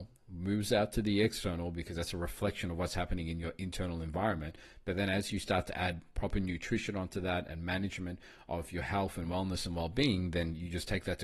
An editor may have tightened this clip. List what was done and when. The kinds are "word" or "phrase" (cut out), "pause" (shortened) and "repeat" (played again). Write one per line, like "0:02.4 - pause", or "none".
none